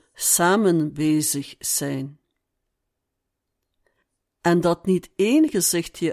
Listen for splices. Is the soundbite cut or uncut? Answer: uncut